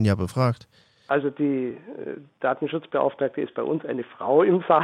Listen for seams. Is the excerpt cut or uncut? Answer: uncut